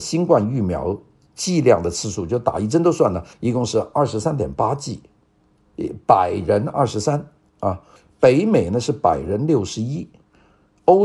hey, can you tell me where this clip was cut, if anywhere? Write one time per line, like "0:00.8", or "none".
0:03.3
0:08.0